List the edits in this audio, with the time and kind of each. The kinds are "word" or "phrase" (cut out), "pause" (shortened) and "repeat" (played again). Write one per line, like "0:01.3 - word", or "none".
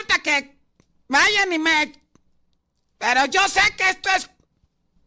none